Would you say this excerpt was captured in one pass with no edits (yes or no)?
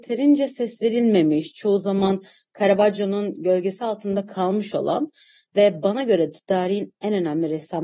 yes